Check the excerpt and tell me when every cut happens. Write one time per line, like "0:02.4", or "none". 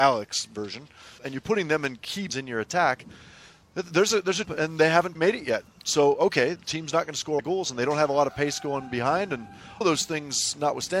0:01.2
0:02.3
0:04.4
0:05.1
0:06.5
0:07.4
0:09.8